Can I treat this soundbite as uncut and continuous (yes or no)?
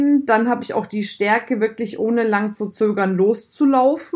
yes